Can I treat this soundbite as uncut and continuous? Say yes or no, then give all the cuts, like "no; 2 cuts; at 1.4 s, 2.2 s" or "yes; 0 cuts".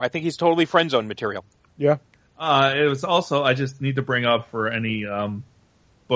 yes; 0 cuts